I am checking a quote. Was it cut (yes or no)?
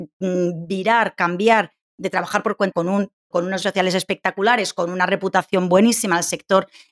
yes